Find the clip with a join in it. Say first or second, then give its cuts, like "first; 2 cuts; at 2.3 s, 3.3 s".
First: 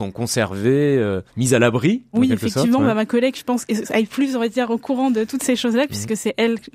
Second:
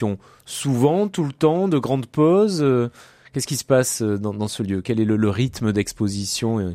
first; 3 cuts; at 1.3 s, 2.1 s, 3.7 s